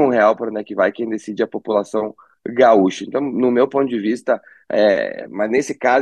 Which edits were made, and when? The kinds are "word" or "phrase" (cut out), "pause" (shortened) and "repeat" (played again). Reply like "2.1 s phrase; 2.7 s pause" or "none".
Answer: none